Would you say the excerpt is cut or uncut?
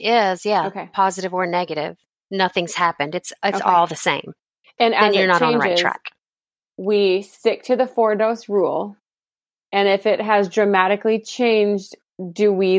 uncut